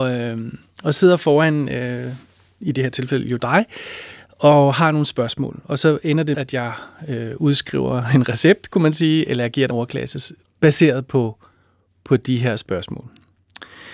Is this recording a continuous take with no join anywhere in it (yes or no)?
no